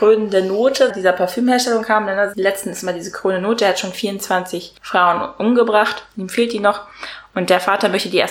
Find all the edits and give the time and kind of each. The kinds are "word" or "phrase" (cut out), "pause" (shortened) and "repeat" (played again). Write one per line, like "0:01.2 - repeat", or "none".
0:00.9 - word
0:02.3 - word
0:04.8 - pause